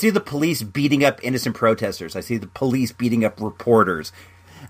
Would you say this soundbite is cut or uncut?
uncut